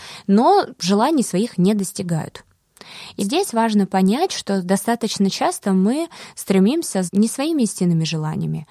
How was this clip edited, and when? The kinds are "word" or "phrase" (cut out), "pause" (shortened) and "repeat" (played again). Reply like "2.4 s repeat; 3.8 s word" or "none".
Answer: 3.2 s word; 7.1 s word